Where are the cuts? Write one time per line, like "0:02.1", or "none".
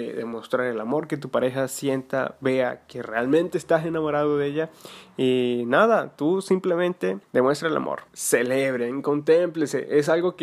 none